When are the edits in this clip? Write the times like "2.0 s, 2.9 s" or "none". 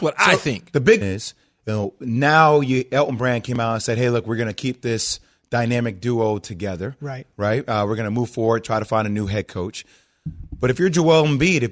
1.0 s